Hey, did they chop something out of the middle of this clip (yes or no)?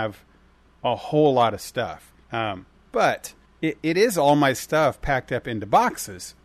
yes